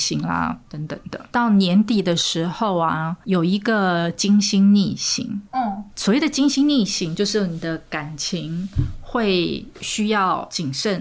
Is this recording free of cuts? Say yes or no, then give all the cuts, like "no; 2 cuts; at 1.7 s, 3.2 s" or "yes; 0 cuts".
no; 1 cut; at 5.5 s